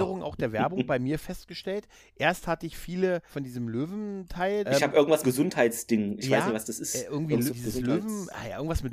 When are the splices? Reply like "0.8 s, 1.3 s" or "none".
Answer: 3.3 s, 4.6 s, 5.2 s, 7.5 s

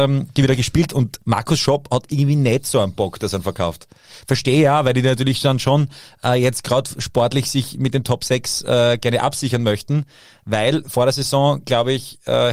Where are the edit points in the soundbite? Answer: none

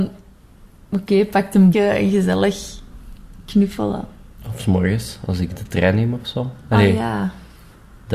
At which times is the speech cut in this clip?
1.7 s

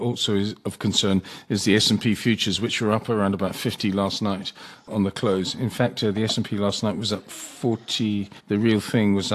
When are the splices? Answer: 8.4 s

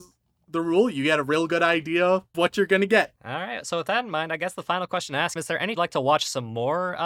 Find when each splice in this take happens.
2.3 s, 3.2 s, 5.4 s, 5.8 s

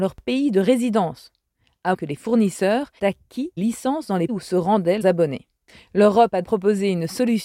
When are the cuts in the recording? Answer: 1.9 s, 3.0 s, 3.6 s, 4.3 s, 5.0 s, 6.4 s

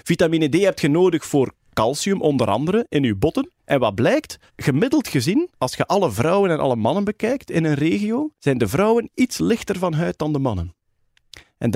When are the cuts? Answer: 3.6 s, 4.5 s, 5.5 s, 8.3 s

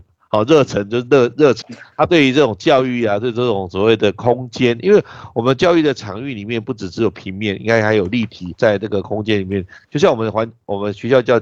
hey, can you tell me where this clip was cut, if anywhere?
1.6 s, 8.5 s

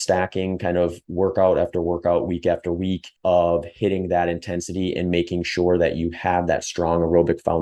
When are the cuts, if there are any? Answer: 3.2 s

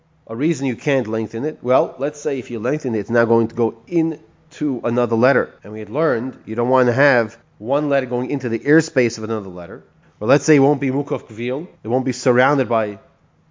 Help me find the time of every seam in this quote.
5.6 s, 7.4 s, 10.0 s, 11.8 s

